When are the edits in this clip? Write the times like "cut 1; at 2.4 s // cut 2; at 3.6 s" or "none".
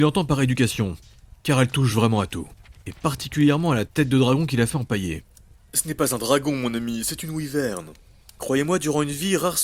none

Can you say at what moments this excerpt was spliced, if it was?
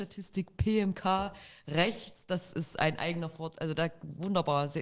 none

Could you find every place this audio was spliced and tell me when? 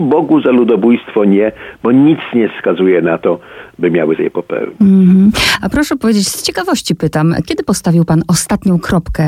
cut 1; at 4.2 s // cut 2; at 7.4 s

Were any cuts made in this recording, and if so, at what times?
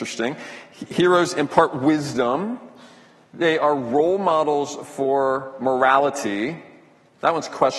none

